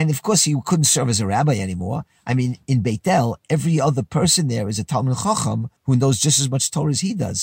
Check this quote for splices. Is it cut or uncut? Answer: cut